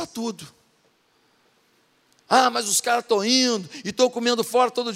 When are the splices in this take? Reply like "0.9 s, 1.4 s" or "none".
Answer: none